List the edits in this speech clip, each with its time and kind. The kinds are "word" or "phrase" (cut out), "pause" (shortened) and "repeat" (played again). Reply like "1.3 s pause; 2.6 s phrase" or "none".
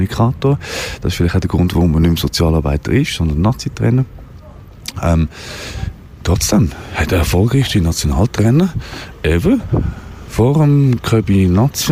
none